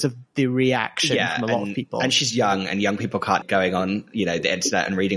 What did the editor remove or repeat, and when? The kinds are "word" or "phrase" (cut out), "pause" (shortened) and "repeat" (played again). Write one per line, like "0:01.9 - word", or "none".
0:03.4 - phrase